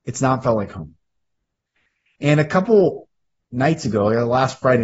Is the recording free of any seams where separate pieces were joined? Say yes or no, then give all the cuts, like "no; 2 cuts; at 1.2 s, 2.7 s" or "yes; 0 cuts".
yes; 0 cuts